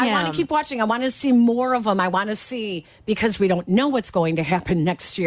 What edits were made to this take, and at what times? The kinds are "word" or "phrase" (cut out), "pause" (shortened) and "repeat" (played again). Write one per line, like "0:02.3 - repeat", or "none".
none